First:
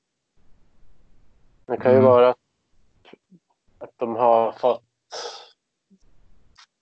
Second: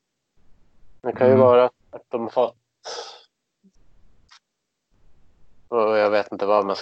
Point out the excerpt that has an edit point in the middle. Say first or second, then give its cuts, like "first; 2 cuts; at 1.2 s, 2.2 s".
second; 3 cuts; at 1.0 s, 1.8 s, 2.3 s